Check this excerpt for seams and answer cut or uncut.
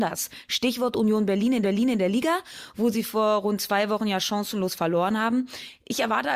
cut